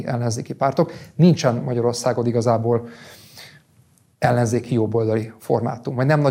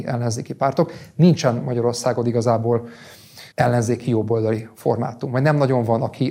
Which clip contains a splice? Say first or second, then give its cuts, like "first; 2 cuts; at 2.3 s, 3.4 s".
second; 1 cut; at 3.5 s